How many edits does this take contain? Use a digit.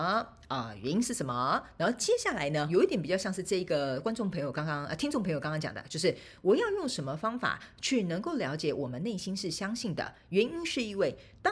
1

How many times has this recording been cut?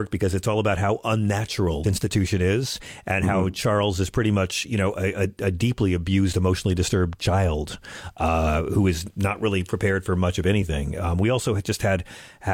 1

